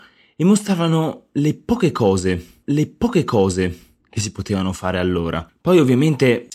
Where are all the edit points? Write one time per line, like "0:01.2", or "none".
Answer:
0:02.6